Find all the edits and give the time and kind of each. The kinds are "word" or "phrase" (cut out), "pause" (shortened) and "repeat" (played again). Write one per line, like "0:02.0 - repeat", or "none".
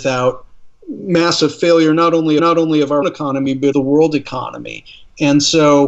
0:02.4 - repeat
0:03.0 - word
0:03.7 - word

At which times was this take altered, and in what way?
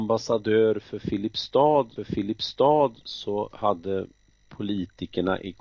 0:02.0 - repeat

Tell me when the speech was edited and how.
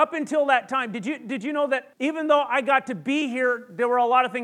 0:01.9 - pause

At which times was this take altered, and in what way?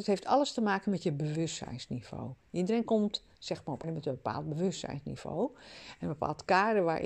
0:03.8 - word

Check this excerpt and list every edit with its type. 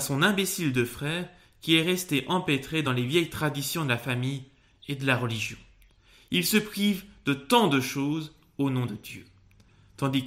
none

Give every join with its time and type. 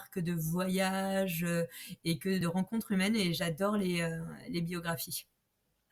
0:02.4 - word

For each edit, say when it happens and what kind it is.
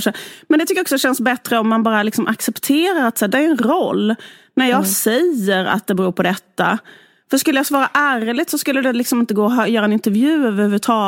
0:03.3 - word

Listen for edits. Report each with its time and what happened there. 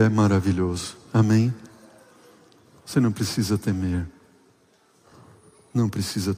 none

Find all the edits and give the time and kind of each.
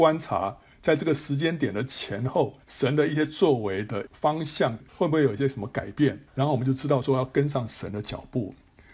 0:02.6 - pause
0:04.9 - pause
0:06.3 - pause

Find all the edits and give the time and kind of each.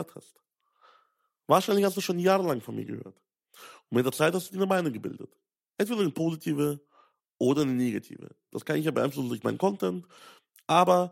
none

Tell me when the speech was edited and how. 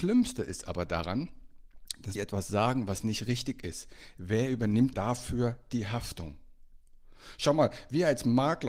0:02.1 - word
0:04.9 - word

